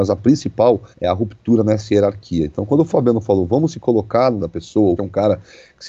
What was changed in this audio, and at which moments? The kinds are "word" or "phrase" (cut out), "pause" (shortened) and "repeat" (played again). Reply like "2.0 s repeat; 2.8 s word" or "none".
0.9 s pause; 4.4 s word; 5.0 s word